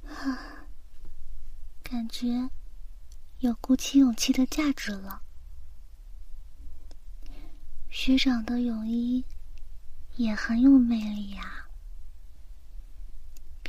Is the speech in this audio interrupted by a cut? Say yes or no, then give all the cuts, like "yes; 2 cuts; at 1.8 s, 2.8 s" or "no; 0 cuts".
no; 0 cuts